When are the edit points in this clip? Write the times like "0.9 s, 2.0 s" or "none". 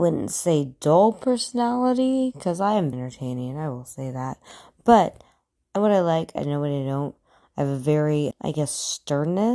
2.9 s, 5.8 s, 8.3 s